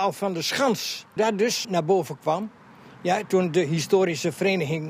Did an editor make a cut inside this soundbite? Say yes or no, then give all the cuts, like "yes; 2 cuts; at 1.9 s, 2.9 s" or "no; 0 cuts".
yes; 2 cuts; at 1.2 s, 1.6 s